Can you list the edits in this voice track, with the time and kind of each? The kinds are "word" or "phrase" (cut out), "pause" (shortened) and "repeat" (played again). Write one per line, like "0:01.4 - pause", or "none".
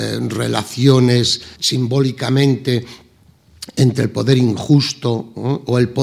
0:01.6 - word